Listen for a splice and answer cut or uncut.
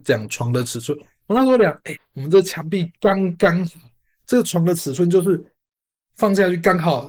cut